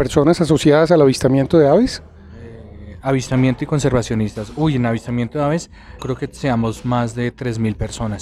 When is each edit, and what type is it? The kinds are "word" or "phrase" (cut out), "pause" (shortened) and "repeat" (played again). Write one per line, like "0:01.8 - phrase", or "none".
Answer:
0:06.0 - word